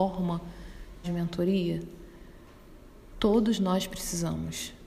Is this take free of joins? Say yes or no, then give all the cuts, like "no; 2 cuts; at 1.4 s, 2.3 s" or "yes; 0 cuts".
no; 1 cut; at 1.0 s